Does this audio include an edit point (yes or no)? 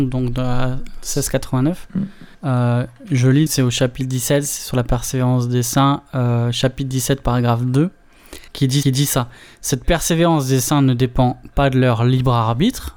yes